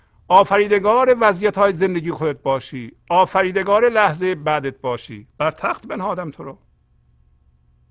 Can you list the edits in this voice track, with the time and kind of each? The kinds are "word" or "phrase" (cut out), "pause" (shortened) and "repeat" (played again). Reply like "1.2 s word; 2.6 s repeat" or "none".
5.3 s pause